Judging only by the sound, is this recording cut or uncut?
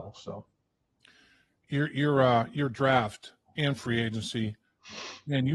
uncut